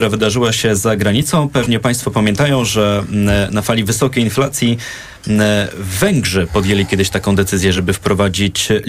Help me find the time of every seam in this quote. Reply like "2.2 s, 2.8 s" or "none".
none